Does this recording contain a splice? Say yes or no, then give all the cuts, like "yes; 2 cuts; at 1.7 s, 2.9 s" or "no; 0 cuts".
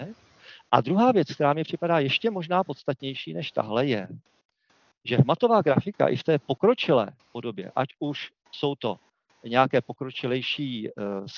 no; 0 cuts